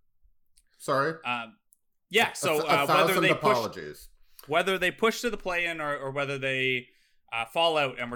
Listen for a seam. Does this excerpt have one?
no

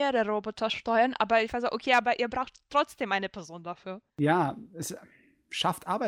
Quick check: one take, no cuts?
no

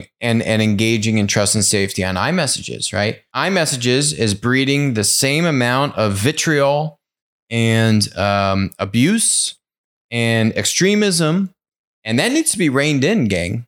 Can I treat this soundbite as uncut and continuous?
yes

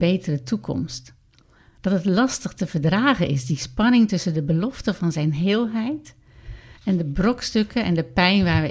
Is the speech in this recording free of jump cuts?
yes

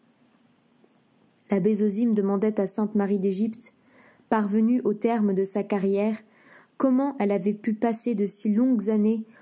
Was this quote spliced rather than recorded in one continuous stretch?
no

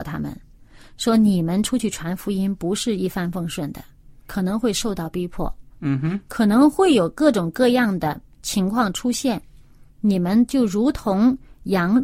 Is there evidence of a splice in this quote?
no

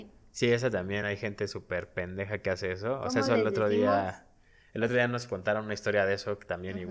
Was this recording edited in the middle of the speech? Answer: no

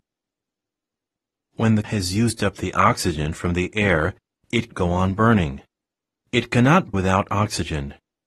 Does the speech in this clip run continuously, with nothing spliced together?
no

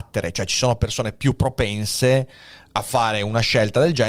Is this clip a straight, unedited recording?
yes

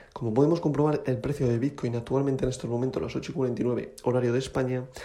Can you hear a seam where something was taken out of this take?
no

